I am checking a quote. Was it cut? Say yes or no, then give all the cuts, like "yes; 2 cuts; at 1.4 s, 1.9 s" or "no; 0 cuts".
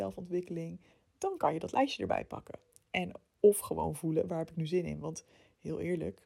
yes; 1 cut; at 0.9 s